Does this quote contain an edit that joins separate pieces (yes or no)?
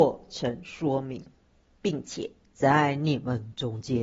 no